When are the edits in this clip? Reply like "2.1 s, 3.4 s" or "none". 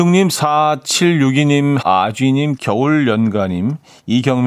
1.8 s, 2.6 s